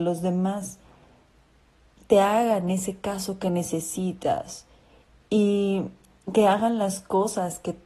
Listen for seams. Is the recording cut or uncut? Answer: uncut